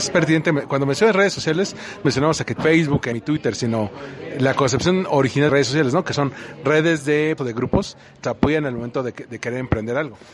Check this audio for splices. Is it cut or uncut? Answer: cut